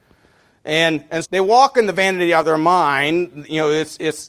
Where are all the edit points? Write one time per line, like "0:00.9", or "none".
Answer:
0:01.2